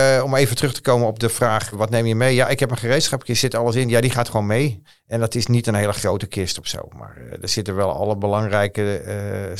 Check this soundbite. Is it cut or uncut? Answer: cut